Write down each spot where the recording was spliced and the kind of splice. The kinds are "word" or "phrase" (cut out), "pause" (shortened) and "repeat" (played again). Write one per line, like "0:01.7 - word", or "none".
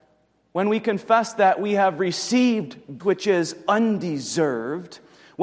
0:03.0 - word